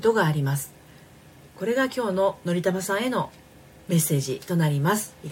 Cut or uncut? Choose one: cut